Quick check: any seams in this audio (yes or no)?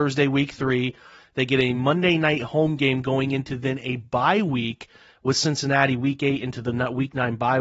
no